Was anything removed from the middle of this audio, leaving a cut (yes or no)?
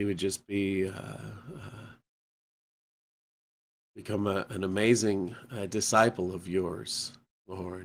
no